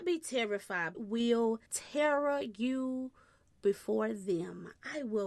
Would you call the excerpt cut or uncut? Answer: cut